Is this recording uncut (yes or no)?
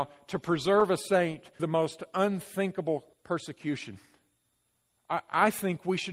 no